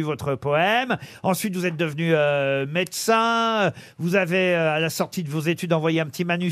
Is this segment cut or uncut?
uncut